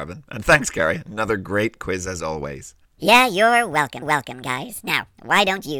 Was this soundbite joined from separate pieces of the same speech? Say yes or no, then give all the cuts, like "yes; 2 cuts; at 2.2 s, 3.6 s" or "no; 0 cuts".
yes; 2 cuts; at 2.8 s, 4.0 s